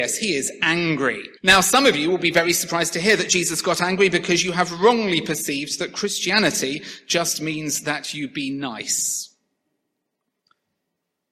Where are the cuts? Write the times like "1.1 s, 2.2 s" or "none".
1.4 s